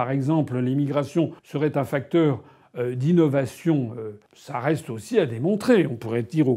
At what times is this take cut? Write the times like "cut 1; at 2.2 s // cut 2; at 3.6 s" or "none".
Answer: cut 1; at 1.4 s // cut 2; at 4.3 s

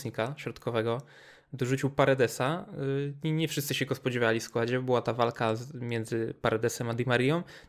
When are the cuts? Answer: none

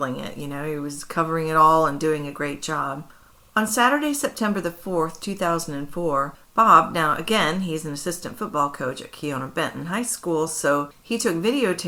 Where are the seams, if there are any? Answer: none

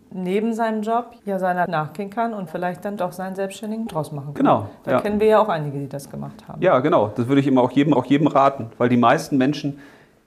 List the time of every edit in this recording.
cut 1; at 1.2 s // cut 2; at 1.7 s // cut 3; at 2.5 s // cut 4; at 3.0 s // cut 5; at 3.9 s // cut 6; at 8.0 s

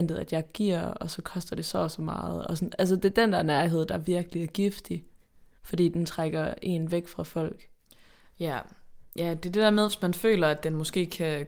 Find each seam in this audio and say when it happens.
none

